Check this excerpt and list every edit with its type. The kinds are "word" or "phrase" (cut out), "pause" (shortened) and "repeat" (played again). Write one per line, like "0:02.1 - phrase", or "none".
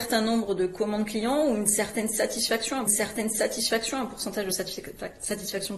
0:02.9 - repeat